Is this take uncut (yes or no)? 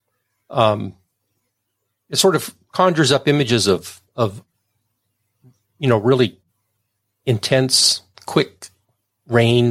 yes